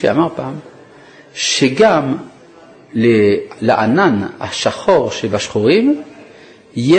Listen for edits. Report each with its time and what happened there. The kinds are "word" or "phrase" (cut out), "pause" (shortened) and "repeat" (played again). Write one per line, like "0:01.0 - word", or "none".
none